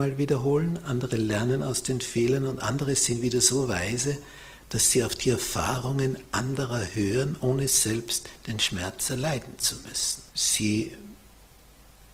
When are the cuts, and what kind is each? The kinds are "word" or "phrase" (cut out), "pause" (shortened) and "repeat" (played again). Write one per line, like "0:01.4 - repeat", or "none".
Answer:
0:10.3 - pause